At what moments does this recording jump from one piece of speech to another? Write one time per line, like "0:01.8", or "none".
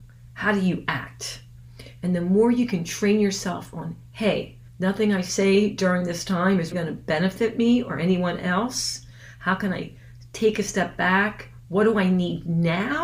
0:04.7
0:06.7